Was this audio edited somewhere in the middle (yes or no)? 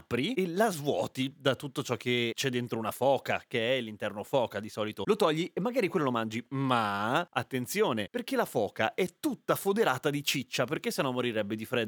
no